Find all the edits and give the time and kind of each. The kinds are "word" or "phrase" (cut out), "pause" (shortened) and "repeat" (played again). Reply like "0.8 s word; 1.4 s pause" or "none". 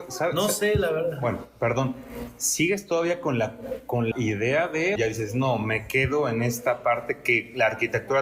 4.1 s word; 5.0 s word